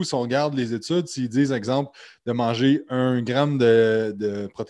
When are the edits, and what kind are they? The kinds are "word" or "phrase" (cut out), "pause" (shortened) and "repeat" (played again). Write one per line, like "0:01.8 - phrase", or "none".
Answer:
none